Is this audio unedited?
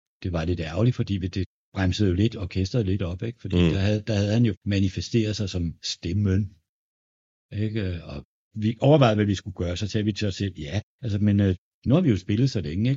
yes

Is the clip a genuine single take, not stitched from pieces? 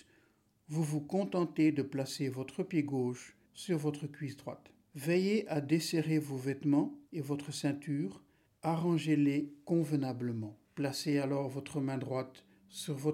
no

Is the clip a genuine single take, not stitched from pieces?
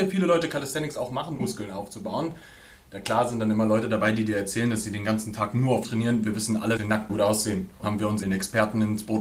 no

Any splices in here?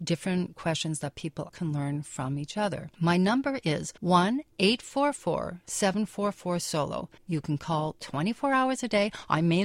yes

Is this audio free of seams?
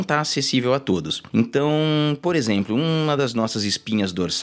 yes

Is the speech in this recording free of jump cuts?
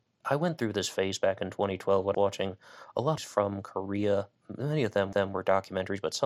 no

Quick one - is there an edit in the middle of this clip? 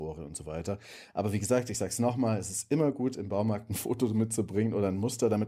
no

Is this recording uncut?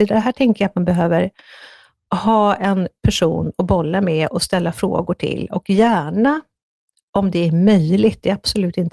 yes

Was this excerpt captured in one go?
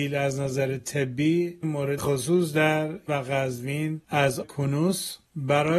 no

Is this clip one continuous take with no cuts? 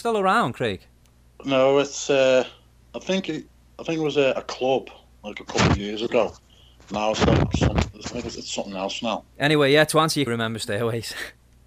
no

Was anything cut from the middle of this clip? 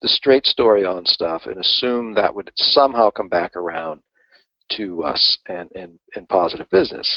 no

